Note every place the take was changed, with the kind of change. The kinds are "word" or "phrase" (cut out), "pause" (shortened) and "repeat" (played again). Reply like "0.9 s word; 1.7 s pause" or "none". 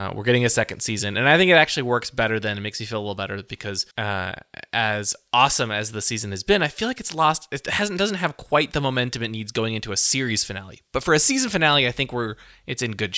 3.9 s pause